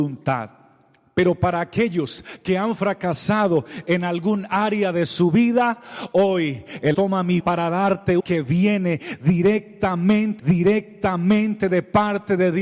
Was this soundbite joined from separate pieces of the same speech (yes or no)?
yes